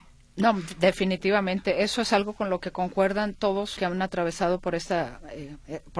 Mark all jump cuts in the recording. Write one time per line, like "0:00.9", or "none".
0:03.8

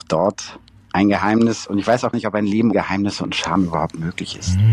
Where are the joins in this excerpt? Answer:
0:02.1
0:02.7

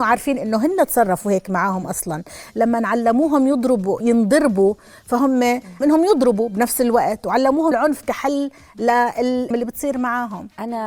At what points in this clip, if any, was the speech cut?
0:04.0
0:05.8
0:07.7
0:09.5

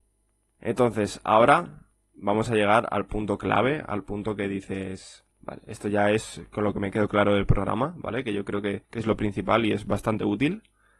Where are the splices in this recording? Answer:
0:05.3
0:08.8

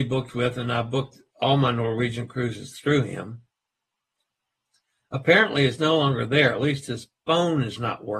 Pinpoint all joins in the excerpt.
none

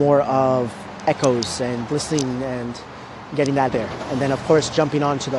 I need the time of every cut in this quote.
0:01.9
0:03.7

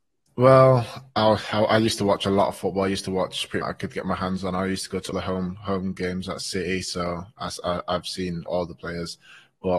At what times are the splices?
0:03.6
0:05.1
0:08.5

